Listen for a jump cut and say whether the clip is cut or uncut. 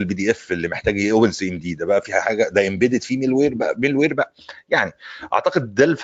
uncut